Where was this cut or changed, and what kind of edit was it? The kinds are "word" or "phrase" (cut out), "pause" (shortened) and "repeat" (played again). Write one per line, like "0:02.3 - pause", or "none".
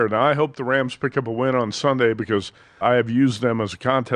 0:02.8 - word